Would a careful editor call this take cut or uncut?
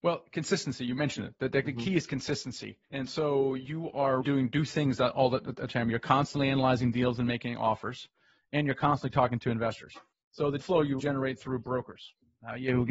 cut